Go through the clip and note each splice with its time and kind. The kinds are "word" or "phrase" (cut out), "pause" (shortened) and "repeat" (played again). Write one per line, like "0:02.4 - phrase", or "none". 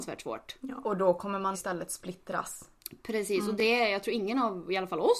0:01.5 - word